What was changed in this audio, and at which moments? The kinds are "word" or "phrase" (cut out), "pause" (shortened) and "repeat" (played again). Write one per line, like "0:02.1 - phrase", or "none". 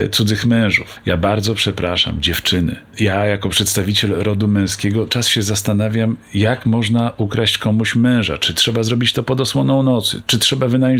0:05.1 - word